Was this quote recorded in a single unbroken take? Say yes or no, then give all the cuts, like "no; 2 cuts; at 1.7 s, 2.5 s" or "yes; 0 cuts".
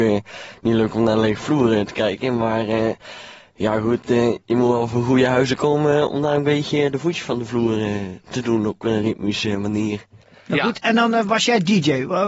yes; 0 cuts